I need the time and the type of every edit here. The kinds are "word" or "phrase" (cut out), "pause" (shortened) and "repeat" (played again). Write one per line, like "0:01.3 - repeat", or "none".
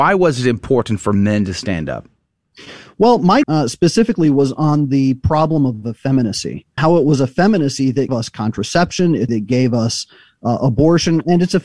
0:03.4 - word
0:06.8 - word
0:08.1 - word
0:09.3 - word